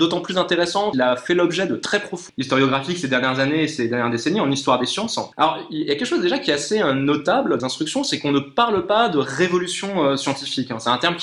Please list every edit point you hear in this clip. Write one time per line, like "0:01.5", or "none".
0:00.9
0:02.3
0:05.3
0:07.6